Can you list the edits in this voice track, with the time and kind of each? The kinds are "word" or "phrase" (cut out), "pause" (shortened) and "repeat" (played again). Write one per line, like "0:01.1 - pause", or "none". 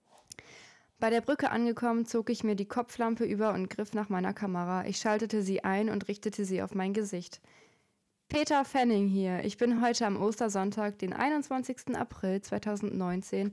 none